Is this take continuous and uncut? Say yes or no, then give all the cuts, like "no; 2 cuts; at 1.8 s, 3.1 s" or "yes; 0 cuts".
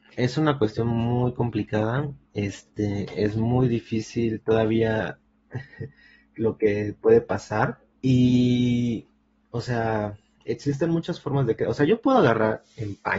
no; 2 cuts; at 2.2 s, 7.9 s